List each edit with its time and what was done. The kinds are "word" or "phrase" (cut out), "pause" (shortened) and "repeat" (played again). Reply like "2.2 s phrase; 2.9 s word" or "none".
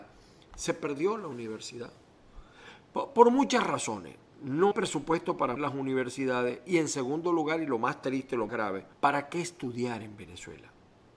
4.7 s word; 5.6 s word; 8.5 s word; 8.9 s pause